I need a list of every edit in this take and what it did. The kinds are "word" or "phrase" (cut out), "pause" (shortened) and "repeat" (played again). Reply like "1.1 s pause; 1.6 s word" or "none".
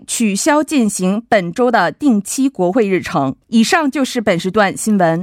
3.4 s pause